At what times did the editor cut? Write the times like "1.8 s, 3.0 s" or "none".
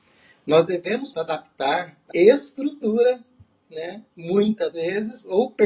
1.1 s, 2.1 s, 4.7 s